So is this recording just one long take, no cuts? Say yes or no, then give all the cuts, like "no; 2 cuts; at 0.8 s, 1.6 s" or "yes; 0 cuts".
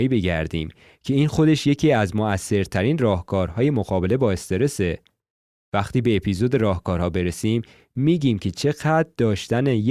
yes; 0 cuts